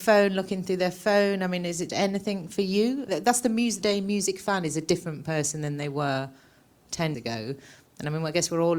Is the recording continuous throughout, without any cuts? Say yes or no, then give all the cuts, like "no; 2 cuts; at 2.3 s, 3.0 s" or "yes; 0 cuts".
no; 4 cuts; at 1.9 s, 3.1 s, 3.8 s, 7.1 s